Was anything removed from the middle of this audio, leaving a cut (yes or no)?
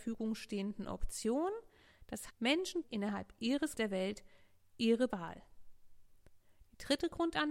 yes